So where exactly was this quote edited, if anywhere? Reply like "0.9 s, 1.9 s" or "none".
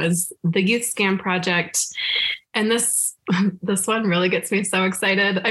none